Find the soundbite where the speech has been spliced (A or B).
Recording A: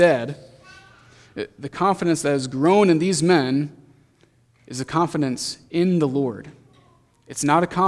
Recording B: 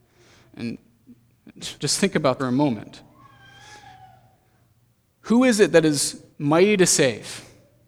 B